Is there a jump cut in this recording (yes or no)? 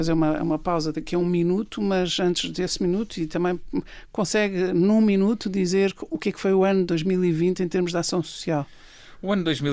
no